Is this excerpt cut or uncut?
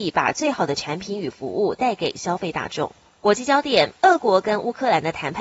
uncut